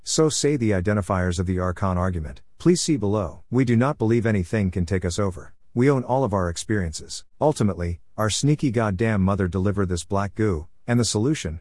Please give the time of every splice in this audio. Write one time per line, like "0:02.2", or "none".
0:03.5
0:05.6
0:07.3